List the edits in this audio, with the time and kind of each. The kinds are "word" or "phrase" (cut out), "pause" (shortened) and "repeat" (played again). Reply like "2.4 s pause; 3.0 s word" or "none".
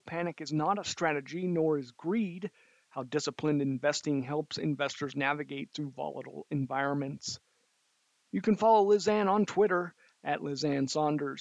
none